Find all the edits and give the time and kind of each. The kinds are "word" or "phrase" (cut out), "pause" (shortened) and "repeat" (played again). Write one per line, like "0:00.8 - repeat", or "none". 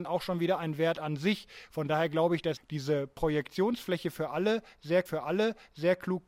0:02.6 - word
0:05.1 - repeat

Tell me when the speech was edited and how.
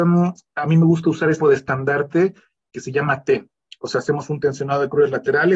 0:01.4 - word

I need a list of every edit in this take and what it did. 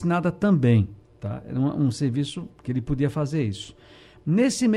0:01.0 - pause
0:02.5 - pause

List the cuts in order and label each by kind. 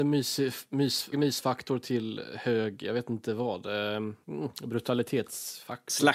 0:01.1 - word
0:04.2 - pause

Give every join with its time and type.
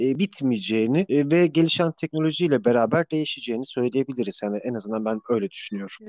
none

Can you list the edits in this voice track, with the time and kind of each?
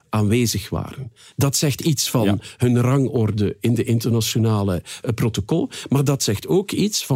none

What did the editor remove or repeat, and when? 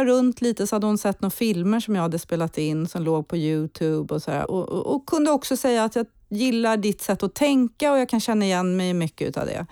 0:04.4 - word

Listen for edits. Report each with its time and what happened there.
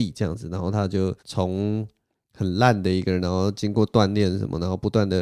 0:01.2 - pause

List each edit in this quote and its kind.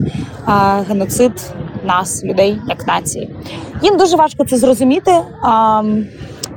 none

